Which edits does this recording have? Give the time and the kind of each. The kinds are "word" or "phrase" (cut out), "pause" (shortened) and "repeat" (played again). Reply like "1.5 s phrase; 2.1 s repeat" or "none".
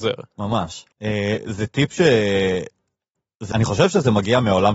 0.9 s pause; 3.5 s word